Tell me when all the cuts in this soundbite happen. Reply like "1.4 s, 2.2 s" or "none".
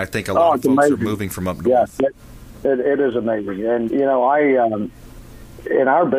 3.9 s